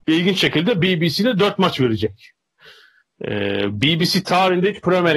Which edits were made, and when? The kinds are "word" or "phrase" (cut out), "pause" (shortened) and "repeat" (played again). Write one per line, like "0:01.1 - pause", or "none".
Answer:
none